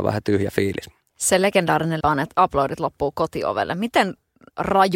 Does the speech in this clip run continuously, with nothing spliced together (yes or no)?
no